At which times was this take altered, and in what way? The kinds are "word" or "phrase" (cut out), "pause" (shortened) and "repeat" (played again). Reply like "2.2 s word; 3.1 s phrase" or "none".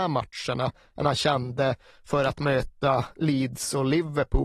none